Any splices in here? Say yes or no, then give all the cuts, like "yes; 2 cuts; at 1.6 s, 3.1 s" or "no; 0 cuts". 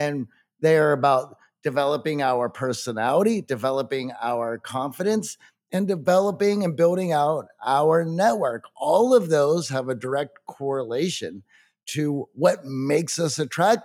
no; 0 cuts